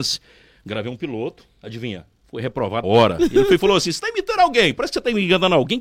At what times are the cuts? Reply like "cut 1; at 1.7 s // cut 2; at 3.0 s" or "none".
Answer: cut 1; at 2.2 s // cut 2; at 2.8 s